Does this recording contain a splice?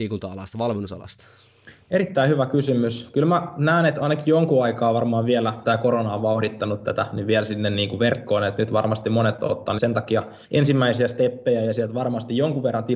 yes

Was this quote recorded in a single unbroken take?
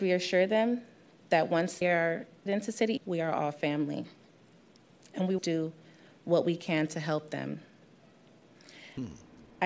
no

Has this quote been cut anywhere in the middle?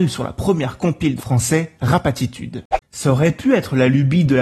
yes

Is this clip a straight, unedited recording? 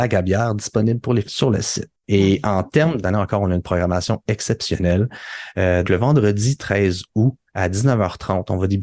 no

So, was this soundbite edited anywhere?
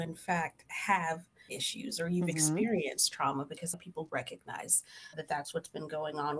yes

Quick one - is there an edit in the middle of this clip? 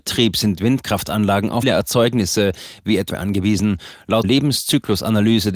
yes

